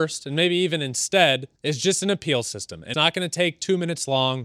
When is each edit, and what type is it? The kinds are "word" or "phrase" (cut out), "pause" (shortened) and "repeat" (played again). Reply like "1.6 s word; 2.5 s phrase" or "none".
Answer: 1.6 s pause; 2.9 s word